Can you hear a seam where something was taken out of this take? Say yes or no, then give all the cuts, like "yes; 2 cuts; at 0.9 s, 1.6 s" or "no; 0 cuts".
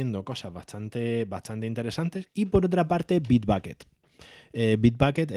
yes; 1 cut; at 2.3 s